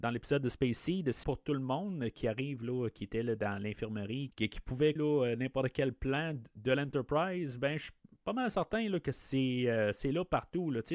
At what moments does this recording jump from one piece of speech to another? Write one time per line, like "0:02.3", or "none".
0:01.2
0:04.3
0:05.0